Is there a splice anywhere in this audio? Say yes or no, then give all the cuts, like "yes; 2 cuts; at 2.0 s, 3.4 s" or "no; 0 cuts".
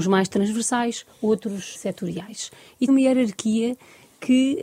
yes; 2 cuts; at 1.7 s, 2.9 s